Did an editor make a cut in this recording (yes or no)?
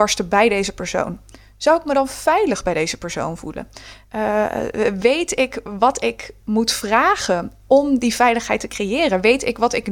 no